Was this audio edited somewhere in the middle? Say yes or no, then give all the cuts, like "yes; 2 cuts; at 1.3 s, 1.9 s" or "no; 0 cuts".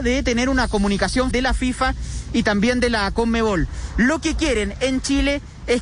yes; 1 cut; at 1.3 s